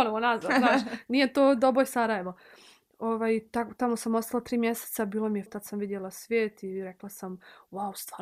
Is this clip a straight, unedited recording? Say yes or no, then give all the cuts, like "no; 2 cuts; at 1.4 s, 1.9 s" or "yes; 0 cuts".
no; 1 cut; at 5.5 s